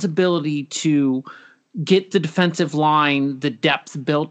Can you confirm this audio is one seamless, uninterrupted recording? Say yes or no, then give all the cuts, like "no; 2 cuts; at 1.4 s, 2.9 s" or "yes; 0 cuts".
yes; 0 cuts